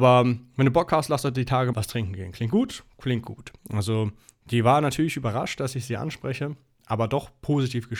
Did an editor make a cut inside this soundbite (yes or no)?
yes